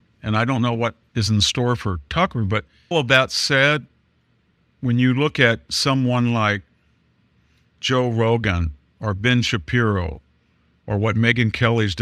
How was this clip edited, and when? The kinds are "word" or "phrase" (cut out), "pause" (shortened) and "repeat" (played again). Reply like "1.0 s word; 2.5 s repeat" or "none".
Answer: 2.9 s word